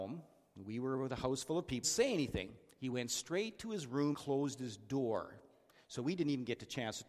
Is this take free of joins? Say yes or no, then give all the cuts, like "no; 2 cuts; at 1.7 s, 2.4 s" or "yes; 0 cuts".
no; 2 cuts; at 1.8 s, 4.1 s